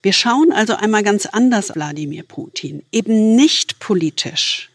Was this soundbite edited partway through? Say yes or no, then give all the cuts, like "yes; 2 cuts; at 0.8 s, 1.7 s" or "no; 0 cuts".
yes; 1 cut; at 1.7 s